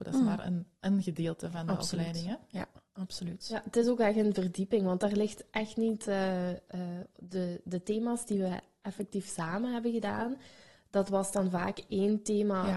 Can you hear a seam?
no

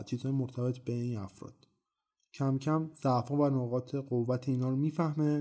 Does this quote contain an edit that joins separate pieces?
no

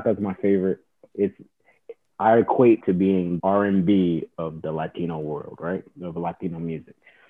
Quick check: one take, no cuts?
no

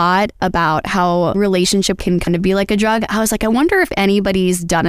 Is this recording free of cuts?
no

